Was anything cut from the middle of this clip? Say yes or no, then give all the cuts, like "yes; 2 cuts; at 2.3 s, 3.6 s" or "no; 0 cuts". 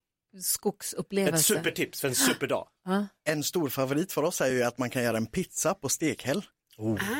no; 0 cuts